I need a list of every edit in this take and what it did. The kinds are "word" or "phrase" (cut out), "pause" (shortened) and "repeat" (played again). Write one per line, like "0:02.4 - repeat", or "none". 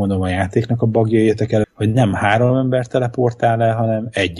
0:01.6 - word